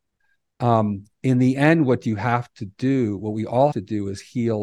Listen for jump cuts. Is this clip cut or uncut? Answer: cut